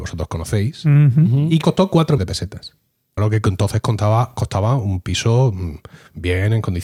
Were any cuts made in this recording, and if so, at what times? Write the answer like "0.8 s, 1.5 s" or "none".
1.6 s, 2.2 s, 3.2 s